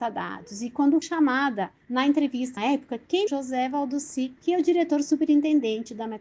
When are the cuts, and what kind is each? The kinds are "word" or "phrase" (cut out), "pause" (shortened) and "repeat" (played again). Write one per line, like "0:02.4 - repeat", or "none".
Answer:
0:01.0 - word
0:01.8 - pause
0:02.6 - phrase
0:03.3 - phrase
0:04.4 - word